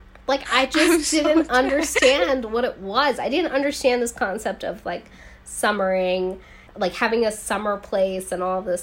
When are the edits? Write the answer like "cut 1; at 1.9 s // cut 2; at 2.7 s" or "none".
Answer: cut 1; at 6.7 s